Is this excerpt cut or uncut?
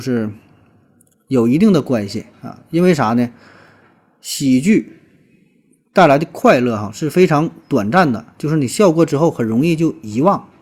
uncut